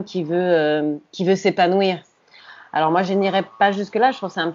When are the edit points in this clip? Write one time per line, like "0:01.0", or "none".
none